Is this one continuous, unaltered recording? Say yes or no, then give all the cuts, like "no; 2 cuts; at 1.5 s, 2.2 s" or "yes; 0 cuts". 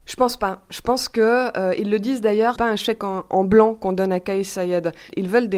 no; 1 cut; at 2.6 s